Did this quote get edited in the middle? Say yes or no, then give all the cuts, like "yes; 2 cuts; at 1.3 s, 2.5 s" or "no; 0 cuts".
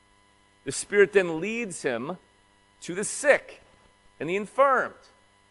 no; 0 cuts